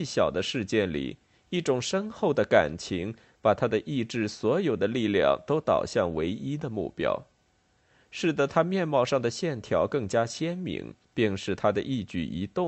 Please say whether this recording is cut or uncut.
cut